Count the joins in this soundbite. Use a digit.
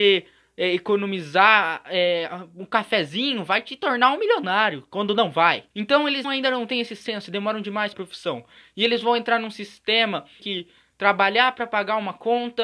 4